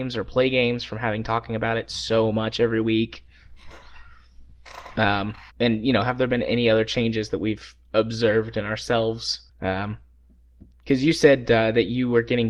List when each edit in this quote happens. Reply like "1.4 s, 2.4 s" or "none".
5.5 s, 9.5 s